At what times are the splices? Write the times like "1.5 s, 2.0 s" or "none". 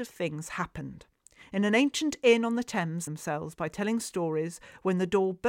3.1 s

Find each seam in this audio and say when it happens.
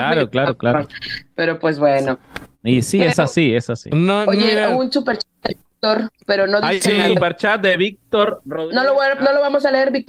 none

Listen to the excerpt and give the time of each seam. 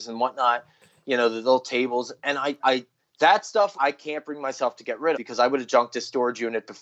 2.6 s, 3.0 s, 3.7 s, 5.1 s

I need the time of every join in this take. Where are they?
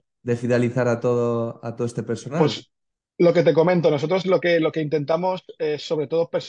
none

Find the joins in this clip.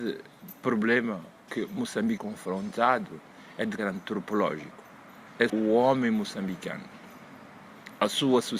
1.5 s, 2.2 s, 3.8 s, 5.5 s

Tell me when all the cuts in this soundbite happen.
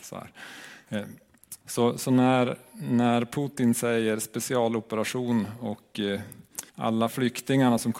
1.6 s, 6.7 s

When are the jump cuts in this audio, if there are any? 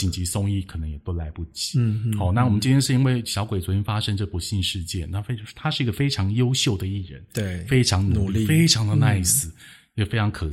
none

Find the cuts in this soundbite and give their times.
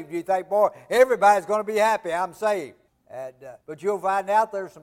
2.9 s, 3.6 s

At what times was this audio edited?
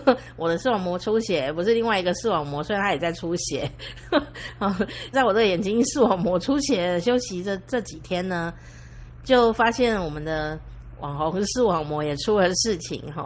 5.1 s

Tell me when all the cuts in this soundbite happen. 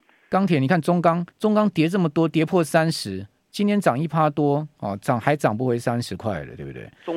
1.3 s

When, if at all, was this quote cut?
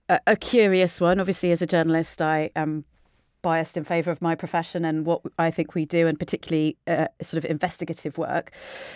none

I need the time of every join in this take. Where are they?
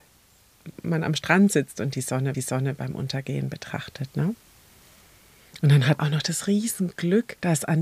2.3 s, 6.0 s

